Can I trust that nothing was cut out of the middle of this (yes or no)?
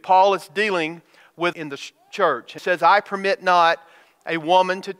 no